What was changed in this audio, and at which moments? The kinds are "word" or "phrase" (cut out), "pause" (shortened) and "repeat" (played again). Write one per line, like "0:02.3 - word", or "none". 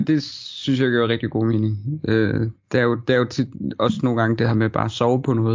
none